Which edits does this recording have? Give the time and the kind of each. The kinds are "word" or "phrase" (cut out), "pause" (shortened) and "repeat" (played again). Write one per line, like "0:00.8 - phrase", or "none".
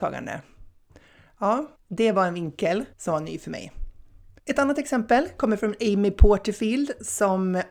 0:01.8 - pause
0:02.9 - pause
0:04.4 - pause